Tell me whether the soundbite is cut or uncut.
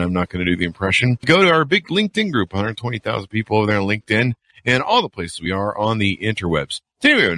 uncut